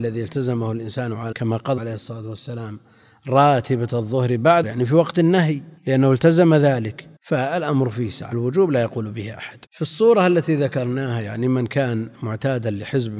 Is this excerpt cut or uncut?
cut